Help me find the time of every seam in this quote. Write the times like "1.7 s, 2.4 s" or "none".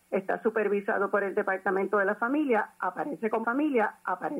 3.4 s